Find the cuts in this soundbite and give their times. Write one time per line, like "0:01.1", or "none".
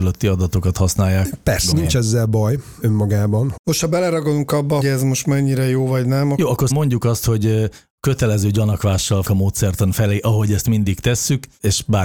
0:01.7
0:04.8
0:06.7
0:09.3